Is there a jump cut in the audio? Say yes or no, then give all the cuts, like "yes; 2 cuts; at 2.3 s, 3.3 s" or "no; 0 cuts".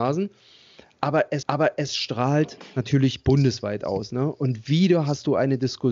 yes; 1 cut; at 1.4 s